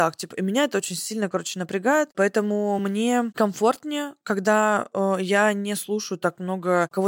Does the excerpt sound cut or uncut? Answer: uncut